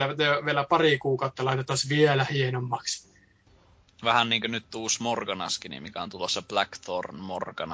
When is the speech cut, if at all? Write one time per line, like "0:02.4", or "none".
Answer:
none